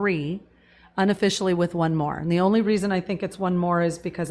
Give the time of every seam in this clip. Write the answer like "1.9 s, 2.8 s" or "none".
none